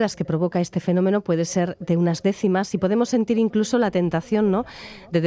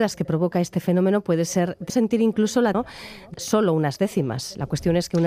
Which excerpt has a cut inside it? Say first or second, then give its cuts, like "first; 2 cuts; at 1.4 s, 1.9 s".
second; 3 cuts; at 1.9 s, 2.7 s, 3.3 s